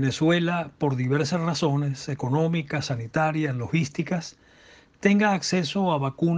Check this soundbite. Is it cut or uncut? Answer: uncut